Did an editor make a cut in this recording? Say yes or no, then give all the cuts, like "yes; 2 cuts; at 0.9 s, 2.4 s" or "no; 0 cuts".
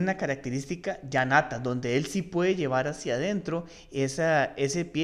no; 0 cuts